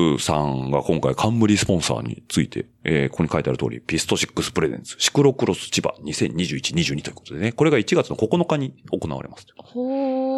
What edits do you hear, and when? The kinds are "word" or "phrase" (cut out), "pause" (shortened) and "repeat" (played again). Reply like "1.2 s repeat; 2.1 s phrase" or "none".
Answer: 2.7 s pause